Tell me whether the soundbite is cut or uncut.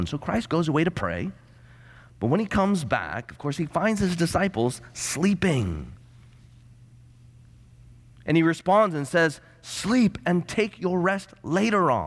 uncut